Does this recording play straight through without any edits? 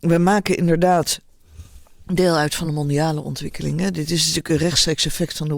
yes; 0 cuts

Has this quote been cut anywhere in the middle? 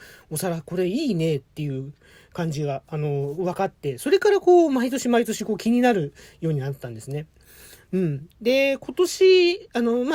no; 0 cuts

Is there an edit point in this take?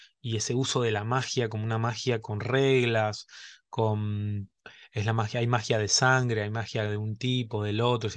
no; 0 cuts

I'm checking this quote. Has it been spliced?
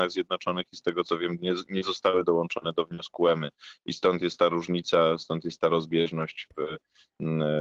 no; 0 cuts

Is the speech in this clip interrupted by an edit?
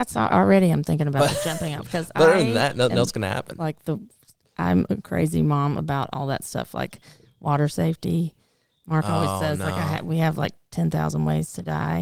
no; 0 cuts

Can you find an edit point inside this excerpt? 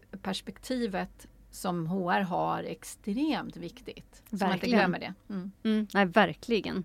no; 0 cuts

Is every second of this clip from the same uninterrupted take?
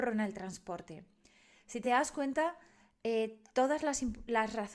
yes; 0 cuts

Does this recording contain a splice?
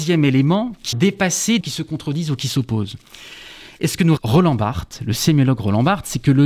yes; 3 cuts; at 0.9 s, 1.6 s, 4.2 s

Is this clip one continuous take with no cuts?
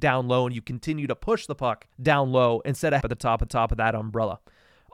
no; 3 cuts; at 1.9 s, 3.0 s, 3.5 s

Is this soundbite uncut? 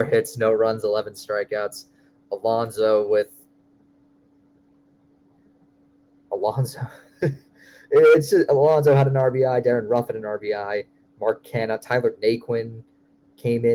yes; 0 cuts

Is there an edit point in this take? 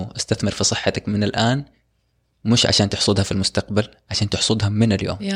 no; 0 cuts

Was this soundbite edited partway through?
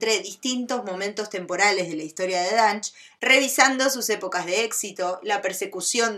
no; 0 cuts

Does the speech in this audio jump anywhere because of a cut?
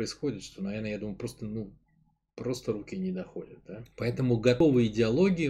yes; 1 cut; at 3.9 s

